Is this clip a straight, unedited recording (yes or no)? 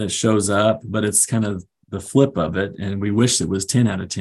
yes